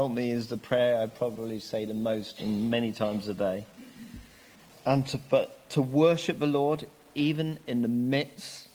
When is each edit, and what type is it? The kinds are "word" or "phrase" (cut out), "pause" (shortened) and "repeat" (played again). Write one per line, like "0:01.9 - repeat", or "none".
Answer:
none

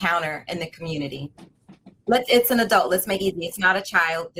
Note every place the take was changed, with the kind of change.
0:02.3 - word
0:03.2 - word

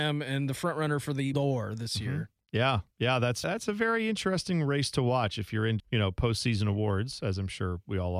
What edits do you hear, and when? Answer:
0:01.3 - word
0:03.4 - word
0:05.8 - word

